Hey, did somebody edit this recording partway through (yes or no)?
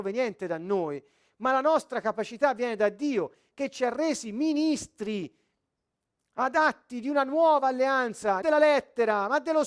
yes